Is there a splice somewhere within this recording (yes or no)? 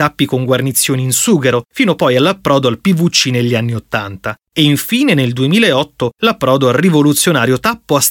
no